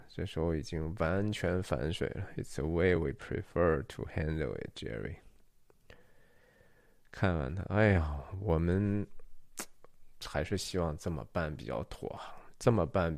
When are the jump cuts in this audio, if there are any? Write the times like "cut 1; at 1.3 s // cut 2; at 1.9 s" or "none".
none